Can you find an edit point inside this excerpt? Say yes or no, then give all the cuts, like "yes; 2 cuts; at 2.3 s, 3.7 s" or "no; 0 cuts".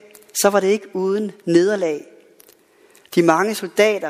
no; 0 cuts